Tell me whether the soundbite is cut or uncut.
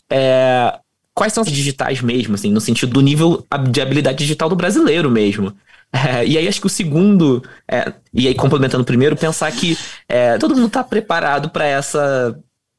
cut